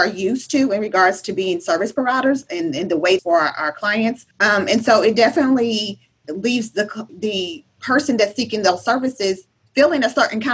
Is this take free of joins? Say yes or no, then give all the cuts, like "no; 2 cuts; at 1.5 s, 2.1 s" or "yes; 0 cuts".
no; 4 cuts; at 3.2 s, 4.3 s, 6.2 s, 7.1 s